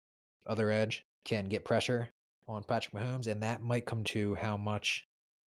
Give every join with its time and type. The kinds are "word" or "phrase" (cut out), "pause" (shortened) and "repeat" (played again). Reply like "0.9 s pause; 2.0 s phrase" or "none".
1.1 s pause; 2.2 s pause; 4.0 s word